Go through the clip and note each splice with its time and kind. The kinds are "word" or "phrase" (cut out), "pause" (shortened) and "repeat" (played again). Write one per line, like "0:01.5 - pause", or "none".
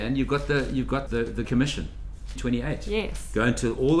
0:01.1 - word
0:01.4 - word
0:02.4 - word